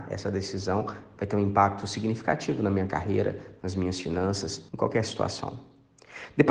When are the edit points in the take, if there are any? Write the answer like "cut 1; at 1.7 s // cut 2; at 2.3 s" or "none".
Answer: cut 1; at 4.7 s